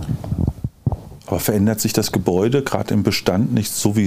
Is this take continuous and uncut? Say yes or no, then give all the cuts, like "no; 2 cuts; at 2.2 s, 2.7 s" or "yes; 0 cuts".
yes; 0 cuts